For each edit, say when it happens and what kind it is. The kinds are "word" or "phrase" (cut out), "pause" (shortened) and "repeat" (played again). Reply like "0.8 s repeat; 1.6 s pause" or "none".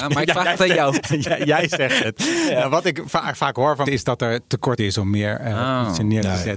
3.9 s word; 4.8 s word